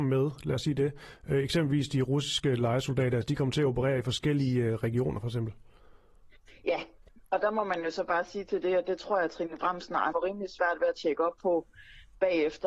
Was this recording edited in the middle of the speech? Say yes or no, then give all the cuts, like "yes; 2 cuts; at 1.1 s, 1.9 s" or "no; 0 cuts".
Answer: yes; 1 cut; at 10.1 s